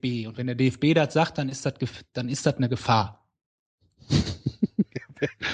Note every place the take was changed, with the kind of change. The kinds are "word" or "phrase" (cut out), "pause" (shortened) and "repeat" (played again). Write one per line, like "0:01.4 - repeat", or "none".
none